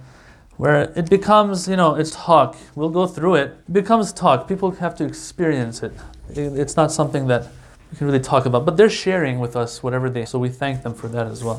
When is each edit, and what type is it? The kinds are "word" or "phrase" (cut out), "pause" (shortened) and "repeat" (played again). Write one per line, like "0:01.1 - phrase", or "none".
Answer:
0:02.1 - word
0:03.6 - pause
0:07.7 - pause
0:10.3 - word